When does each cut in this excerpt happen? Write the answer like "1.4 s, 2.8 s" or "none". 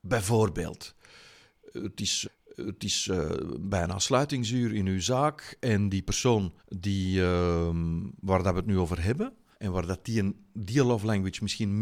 2.2 s, 6.6 s, 9.5 s